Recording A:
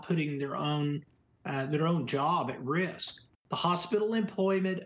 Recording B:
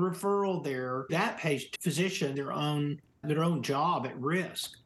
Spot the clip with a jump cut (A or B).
B